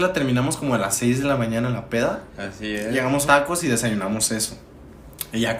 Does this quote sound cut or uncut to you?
cut